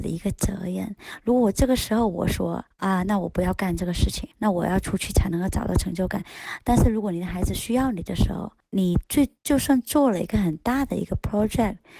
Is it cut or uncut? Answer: uncut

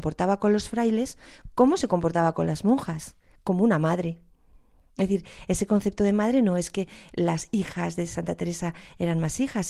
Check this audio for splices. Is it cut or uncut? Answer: uncut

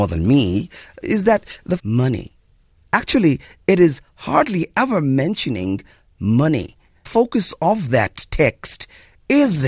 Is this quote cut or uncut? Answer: cut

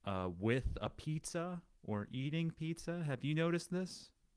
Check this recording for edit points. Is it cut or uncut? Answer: uncut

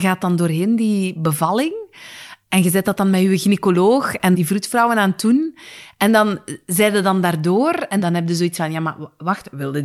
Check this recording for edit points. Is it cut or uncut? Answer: uncut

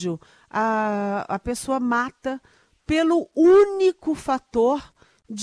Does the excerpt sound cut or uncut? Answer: uncut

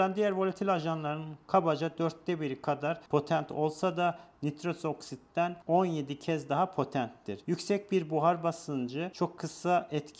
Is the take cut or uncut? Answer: uncut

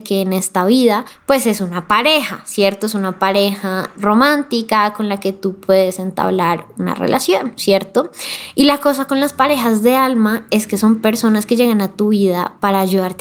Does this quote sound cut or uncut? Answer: uncut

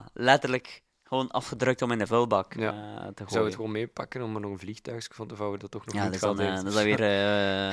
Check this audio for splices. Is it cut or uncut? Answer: uncut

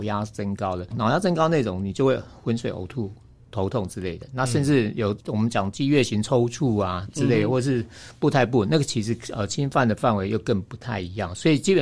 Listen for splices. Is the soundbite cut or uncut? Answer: cut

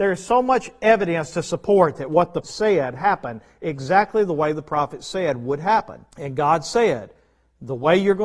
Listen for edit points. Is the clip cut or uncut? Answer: cut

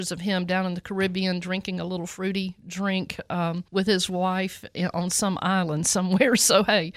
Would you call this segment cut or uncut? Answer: cut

